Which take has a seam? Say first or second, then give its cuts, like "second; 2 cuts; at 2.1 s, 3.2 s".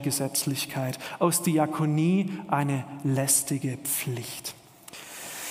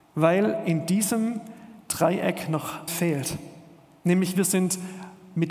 second; 1 cut; at 2.9 s